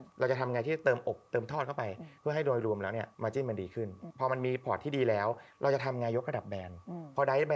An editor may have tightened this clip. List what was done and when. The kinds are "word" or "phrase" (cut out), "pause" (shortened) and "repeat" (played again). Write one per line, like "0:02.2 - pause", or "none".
0:02.2 - pause
0:03.1 - pause